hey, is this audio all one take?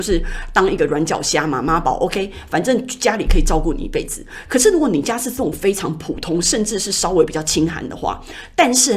yes; 0 cuts

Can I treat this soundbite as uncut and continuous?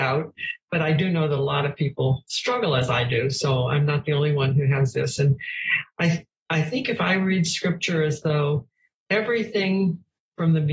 yes; 0 cuts

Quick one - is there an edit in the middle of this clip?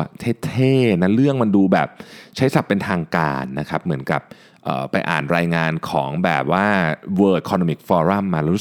no; 0 cuts

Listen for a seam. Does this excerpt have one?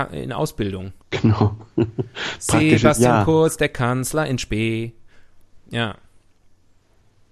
yes; 2 cuts; at 1.0 s, 5.6 s

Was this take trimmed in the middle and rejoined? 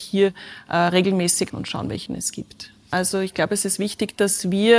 yes; 2 cuts; at 1.5 s, 2.1 s

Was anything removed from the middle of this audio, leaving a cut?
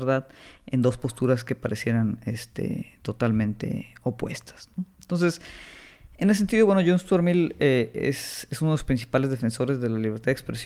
no; 0 cuts

